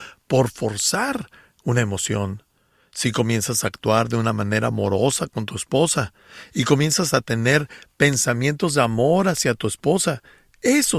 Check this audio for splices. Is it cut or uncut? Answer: uncut